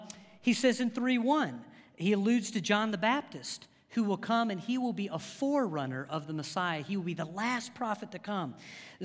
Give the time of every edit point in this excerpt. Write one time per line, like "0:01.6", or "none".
none